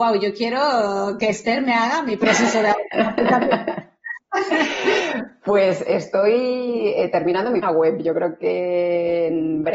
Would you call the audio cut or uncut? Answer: cut